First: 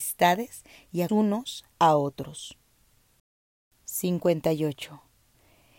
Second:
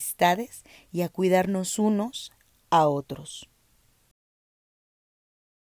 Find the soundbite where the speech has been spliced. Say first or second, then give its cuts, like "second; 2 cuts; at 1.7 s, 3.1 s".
first; 3 cuts; at 1.1 s, 1.7 s, 3.4 s